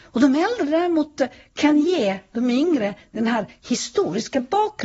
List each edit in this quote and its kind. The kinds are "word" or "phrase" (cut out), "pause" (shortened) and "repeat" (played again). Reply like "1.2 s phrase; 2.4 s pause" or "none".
none